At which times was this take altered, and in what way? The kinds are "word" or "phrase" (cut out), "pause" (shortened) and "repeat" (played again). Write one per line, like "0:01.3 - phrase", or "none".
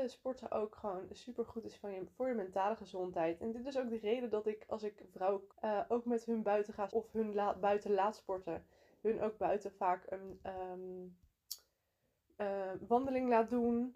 0:05.5 - word
0:06.9 - word